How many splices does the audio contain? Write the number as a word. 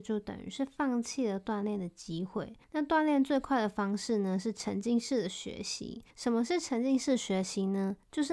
one